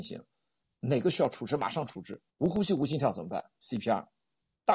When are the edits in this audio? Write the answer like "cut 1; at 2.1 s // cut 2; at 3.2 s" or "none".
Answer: cut 1; at 2.3 s